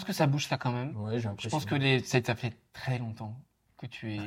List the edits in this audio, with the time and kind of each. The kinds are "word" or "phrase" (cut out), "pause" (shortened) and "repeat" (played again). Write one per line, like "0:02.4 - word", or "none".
none